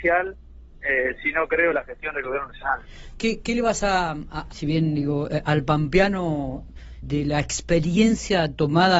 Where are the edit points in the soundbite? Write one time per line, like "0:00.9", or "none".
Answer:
0:04.5
0:07.0